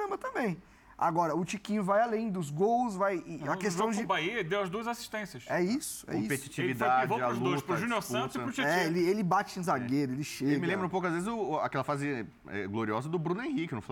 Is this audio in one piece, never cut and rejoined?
yes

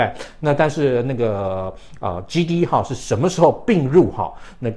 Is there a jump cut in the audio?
no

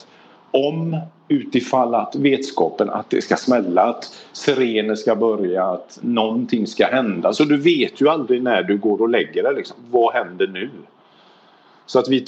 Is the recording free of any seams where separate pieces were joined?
yes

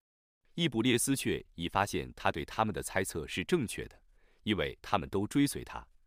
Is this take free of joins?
yes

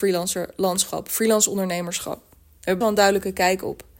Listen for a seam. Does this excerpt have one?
yes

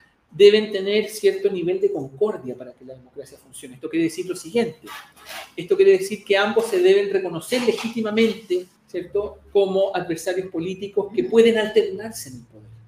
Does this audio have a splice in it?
yes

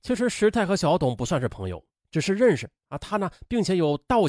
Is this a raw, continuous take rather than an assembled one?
no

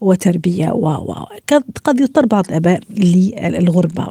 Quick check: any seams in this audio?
no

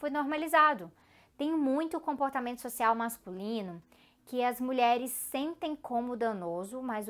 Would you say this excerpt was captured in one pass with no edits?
yes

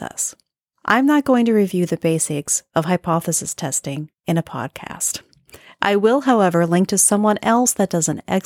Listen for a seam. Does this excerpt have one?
no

